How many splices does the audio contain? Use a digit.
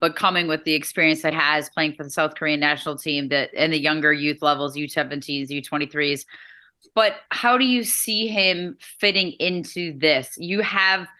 1